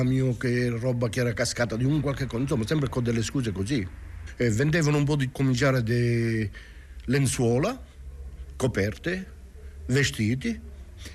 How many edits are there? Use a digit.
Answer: 2